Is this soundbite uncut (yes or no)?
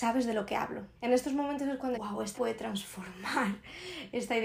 no